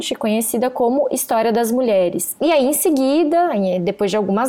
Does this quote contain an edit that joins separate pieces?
no; 0 cuts

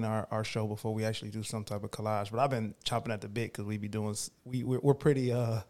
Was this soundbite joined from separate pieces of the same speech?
no; 0 cuts

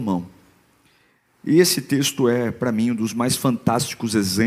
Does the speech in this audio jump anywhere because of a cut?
no; 0 cuts

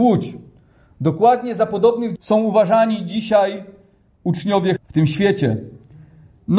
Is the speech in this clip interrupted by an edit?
yes; 2 cuts; at 2.2 s, 4.8 s

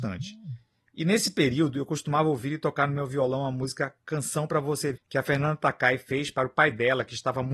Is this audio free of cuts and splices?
no; 1 cut; at 5.0 s

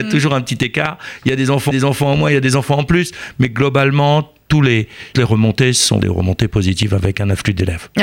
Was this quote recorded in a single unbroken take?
no; 3 cuts; at 1.7 s, 5.1 s, 6.0 s

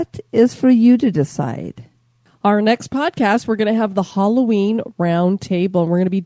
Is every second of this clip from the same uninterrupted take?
yes; 0 cuts

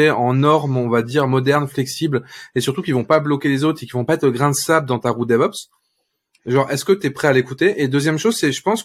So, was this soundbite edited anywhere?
no; 0 cuts

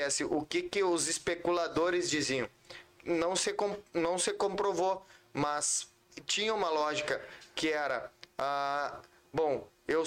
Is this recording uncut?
yes; 0 cuts

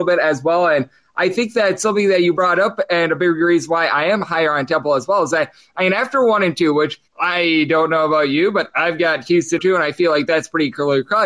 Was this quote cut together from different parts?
yes; 2 cuts; at 7.1 s, 9.6 s

